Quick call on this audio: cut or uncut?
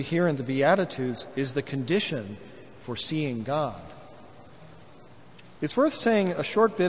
cut